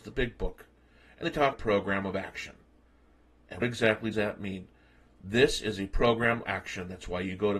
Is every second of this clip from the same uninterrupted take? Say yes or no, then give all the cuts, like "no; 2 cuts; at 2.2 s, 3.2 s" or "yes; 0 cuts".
no; 5 cuts; at 1.2 s, 1.5 s, 3.6 s, 4.1 s, 6.4 s